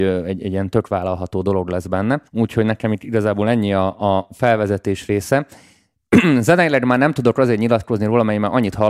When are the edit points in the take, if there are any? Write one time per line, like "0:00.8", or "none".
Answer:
0:02.3